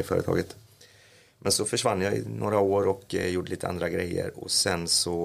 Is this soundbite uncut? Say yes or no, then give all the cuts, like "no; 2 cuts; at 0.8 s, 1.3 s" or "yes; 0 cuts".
yes; 0 cuts